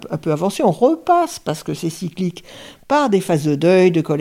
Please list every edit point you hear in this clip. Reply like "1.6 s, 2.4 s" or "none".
none